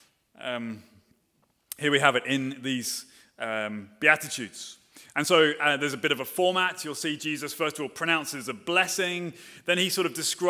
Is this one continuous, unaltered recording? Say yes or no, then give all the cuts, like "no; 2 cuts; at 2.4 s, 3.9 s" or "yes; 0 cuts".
yes; 0 cuts